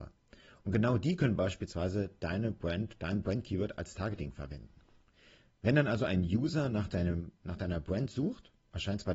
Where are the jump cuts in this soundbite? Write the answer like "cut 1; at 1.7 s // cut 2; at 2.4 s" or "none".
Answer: none